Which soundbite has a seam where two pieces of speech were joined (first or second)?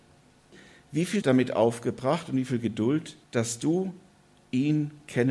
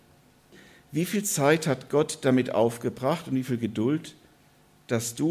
first